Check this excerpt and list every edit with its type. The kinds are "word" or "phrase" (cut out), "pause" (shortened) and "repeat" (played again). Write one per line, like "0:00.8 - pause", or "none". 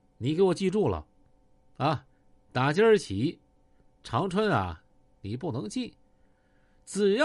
none

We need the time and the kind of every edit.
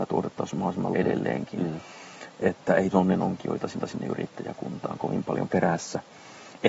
0:00.9 - word
0:02.9 - word
0:03.8 - repeat
0:05.5 - word

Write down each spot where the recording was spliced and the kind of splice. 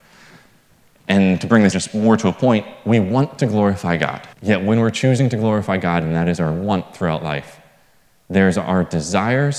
0:01.7 - word
0:04.3 - pause

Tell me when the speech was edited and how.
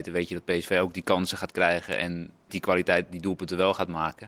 0:02.5 - word

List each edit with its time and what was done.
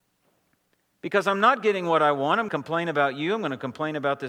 0:02.5 - phrase

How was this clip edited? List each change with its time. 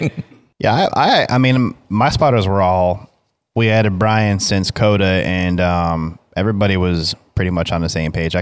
none

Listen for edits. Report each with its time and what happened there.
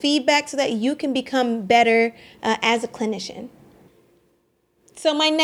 none

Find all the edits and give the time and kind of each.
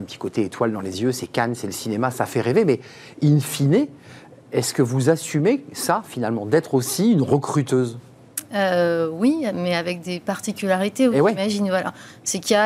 none

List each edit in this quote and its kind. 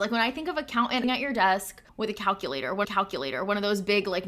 0:01.0 - phrase
0:01.9 - pause
0:02.8 - repeat

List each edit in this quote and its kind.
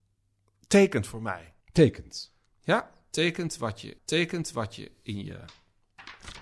0:01.6 - pause
0:04.0 - repeat

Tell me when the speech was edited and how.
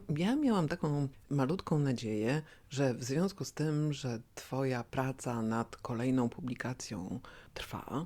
none

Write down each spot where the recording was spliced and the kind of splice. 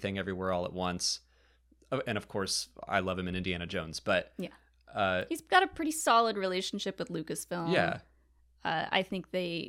none

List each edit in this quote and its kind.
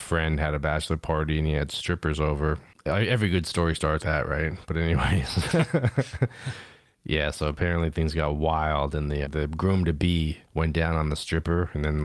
0:04.0 - word
0:09.2 - word

